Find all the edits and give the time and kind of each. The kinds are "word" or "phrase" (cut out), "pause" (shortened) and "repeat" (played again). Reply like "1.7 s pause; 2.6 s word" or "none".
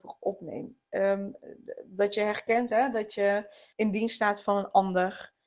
3.7 s pause